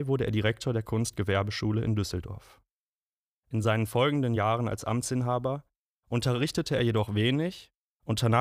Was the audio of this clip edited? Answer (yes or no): no